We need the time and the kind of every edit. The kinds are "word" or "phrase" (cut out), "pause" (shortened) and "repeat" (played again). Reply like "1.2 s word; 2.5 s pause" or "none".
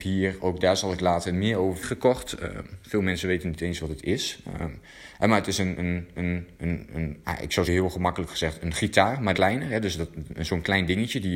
1.8 s phrase; 6.1 s repeat; 7.6 s phrase; 9.3 s word